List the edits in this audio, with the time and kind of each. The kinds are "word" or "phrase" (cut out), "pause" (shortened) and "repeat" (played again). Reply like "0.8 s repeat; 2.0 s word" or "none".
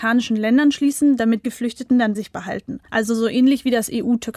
1.4 s phrase; 2.1 s word; 2.9 s pause